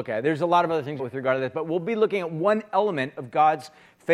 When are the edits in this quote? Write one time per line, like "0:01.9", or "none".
0:01.0